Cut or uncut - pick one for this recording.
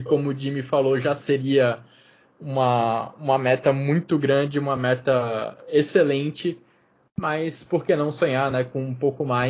uncut